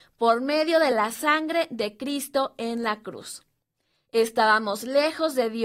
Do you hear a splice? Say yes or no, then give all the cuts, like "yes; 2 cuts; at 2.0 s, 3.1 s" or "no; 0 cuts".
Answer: no; 0 cuts